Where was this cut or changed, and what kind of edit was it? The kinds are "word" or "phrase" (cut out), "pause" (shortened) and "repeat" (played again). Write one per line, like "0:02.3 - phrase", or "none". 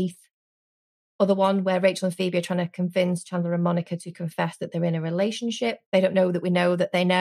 0:05.8 - pause